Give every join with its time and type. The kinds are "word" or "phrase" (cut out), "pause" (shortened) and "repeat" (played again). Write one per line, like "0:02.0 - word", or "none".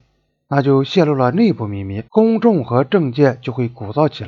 0:02.1 - pause